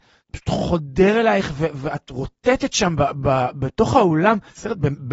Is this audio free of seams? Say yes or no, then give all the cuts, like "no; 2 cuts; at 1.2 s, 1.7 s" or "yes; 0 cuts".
yes; 0 cuts